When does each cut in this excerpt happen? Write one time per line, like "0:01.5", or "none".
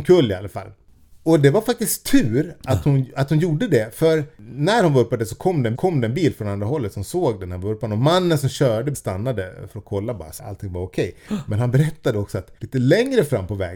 0:04.3
0:05.7
0:08.9
0:10.4
0:12.6